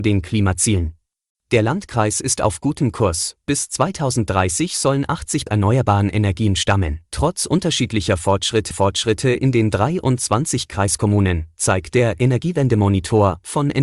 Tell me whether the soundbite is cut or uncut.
cut